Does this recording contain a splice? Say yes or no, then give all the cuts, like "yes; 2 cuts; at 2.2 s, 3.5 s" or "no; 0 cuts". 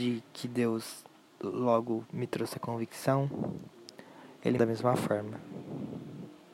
yes; 1 cut; at 4.6 s